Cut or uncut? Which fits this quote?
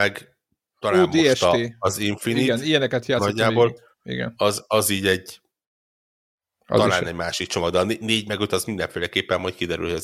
uncut